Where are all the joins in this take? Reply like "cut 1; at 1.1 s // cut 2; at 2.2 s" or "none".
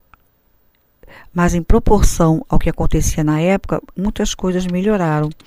none